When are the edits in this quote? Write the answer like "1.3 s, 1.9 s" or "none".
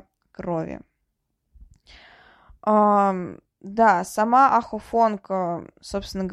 none